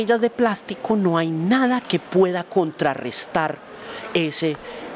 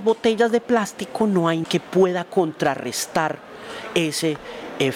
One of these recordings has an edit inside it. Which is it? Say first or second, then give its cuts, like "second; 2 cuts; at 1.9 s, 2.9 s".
second; 1 cut; at 1.6 s